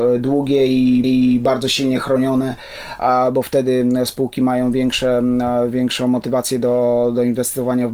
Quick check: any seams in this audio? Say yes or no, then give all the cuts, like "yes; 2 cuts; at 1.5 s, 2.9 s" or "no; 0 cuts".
yes; 1 cut; at 1.0 s